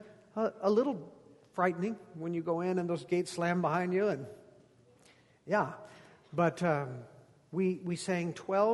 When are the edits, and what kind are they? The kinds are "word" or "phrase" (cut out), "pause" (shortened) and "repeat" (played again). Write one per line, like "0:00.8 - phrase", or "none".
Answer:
none